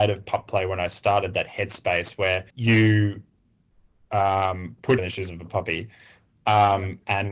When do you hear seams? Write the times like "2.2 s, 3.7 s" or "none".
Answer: 2.5 s, 5.0 s